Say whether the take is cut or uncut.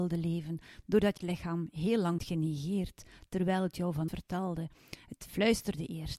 cut